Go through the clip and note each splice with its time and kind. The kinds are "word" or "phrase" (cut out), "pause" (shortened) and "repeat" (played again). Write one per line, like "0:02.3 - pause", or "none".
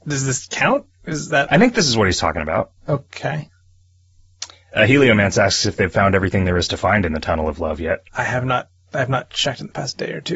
0:02.8 - pause
0:08.1 - pause